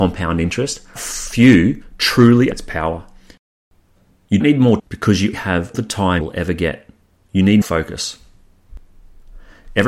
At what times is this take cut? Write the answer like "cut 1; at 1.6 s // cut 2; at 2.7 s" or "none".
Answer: cut 1; at 1.0 s // cut 2; at 2.5 s // cut 3; at 4.4 s // cut 4; at 4.8 s // cut 5; at 5.3 s // cut 6; at 5.7 s // cut 7; at 6.2 s // cut 8; at 7.6 s